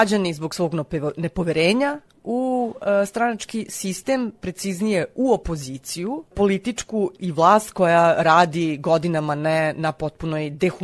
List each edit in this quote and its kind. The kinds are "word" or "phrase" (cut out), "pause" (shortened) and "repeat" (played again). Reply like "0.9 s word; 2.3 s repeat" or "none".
none